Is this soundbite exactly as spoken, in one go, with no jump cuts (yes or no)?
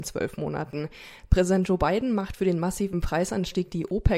yes